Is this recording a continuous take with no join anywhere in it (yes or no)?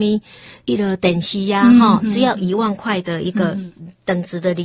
yes